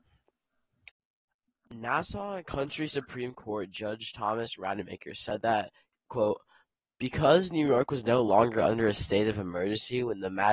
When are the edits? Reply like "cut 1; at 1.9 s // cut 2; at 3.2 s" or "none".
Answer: none